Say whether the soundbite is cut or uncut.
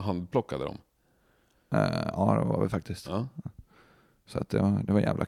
uncut